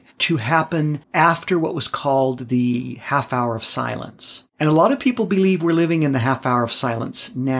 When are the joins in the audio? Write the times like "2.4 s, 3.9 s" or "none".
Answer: 1.0 s, 4.5 s